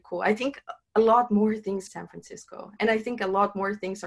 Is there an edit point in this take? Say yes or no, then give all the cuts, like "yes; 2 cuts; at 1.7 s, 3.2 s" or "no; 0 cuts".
yes; 2 cuts; at 1.9 s, 2.8 s